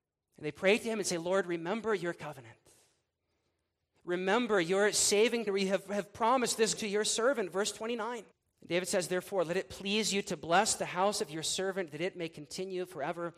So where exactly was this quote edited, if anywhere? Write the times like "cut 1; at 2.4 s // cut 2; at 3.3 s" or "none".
cut 1; at 5.5 s // cut 2; at 6.8 s // cut 3; at 8.3 s